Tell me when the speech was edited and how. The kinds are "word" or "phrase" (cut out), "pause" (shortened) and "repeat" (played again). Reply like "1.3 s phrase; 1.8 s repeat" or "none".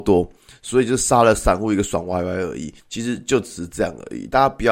2.8 s pause

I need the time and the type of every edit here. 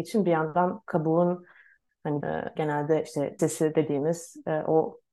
2.2 s word; 2.6 s word; 3.4 s word

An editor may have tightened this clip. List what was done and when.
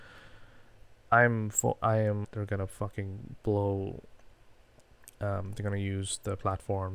2.2 s phrase

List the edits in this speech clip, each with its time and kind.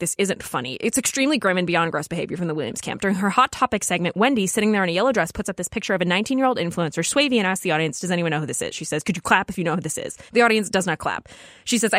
10.3 s pause

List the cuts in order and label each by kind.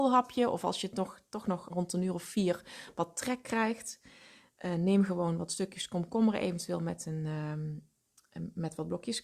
1.7 s word

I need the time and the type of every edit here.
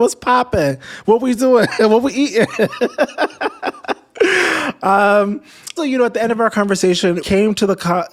5.8 s word; 7.2 s word

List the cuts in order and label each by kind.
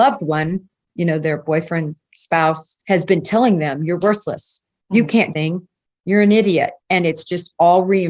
2.8 s pause; 5.3 s word; 6.8 s pause

